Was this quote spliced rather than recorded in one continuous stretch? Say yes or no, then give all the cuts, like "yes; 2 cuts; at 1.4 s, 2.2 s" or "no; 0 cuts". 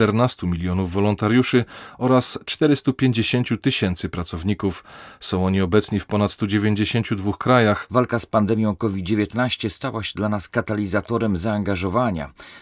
no; 0 cuts